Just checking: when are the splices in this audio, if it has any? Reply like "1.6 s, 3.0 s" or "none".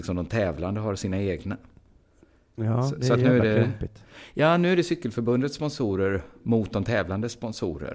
none